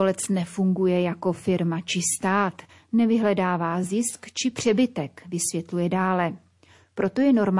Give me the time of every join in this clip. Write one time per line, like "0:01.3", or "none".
none